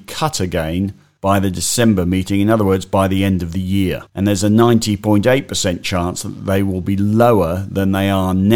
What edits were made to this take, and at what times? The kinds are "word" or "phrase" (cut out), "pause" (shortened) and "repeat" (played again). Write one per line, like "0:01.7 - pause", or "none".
0:04.1 - pause